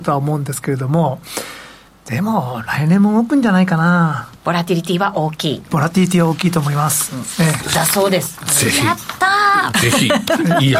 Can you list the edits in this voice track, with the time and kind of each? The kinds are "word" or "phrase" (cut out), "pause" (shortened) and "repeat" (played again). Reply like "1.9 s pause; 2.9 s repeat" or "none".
1.9 s pause; 4.4 s pause